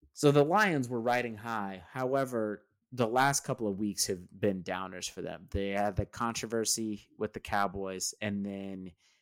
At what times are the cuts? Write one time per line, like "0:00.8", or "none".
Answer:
none